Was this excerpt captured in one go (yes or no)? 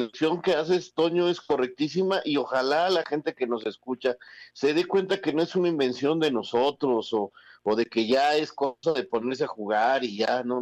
yes